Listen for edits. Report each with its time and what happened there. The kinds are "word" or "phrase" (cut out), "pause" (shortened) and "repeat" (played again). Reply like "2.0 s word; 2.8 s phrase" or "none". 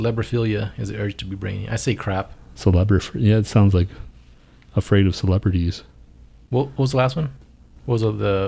none